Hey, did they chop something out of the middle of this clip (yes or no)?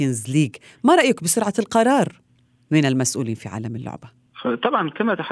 no